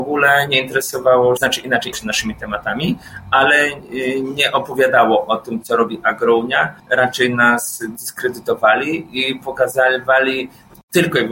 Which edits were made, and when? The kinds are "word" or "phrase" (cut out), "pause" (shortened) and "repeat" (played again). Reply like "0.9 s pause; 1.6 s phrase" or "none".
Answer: 1.4 s word; 1.9 s word; 6.8 s pause